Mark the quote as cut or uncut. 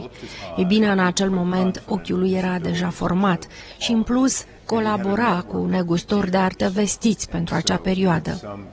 cut